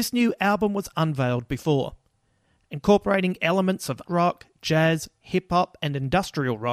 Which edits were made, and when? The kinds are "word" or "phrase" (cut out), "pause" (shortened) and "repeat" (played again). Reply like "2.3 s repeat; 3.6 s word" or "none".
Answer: 0.9 s phrase; 4.1 s word